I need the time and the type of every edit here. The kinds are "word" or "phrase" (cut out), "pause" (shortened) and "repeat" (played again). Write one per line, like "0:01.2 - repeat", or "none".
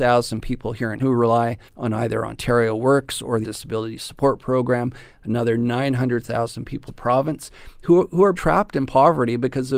0:01.0 - word
0:01.7 - pause
0:03.4 - word
0:06.9 - word
0:08.3 - word